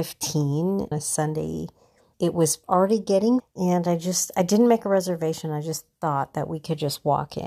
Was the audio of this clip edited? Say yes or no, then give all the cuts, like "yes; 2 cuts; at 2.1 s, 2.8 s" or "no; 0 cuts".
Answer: yes; 4 cuts; at 0.9 s, 2.1 s, 2.6 s, 3.4 s